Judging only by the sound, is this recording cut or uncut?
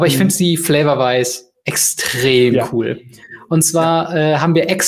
uncut